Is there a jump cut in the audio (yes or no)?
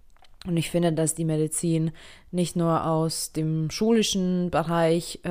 no